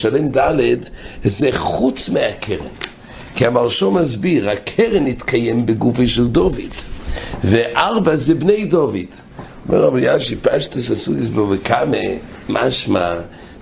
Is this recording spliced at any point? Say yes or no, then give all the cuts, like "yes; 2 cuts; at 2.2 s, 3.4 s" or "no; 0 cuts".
no; 0 cuts